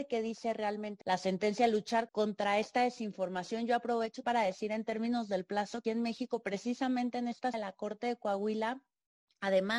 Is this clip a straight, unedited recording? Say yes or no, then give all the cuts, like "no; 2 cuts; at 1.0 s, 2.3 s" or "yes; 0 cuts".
no; 5 cuts; at 1.0 s, 2.1 s, 4.2 s, 5.8 s, 7.5 s